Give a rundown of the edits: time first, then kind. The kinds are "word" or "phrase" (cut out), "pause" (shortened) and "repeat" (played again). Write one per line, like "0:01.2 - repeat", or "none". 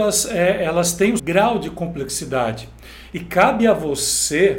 0:01.2 - word